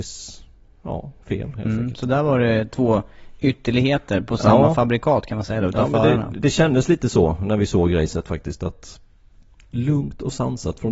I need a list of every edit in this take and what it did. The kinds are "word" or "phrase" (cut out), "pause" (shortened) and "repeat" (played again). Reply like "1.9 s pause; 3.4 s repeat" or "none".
none